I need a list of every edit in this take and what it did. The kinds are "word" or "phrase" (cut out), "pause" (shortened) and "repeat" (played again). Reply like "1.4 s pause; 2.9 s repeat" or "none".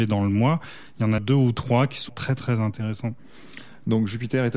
1.2 s word; 2.1 s word